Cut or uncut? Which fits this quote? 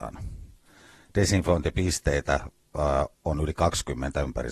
uncut